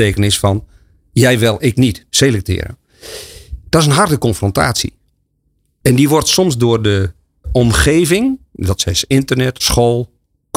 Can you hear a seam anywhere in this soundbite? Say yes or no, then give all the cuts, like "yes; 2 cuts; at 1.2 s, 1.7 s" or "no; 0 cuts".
yes; 2 cuts; at 7.4 s, 9.6 s